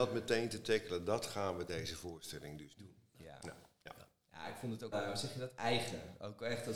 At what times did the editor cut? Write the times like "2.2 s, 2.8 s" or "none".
1.7 s, 2.8 s, 4.9 s